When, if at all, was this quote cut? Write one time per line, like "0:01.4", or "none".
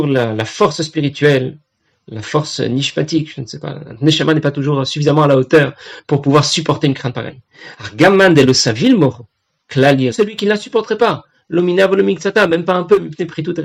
0:10.1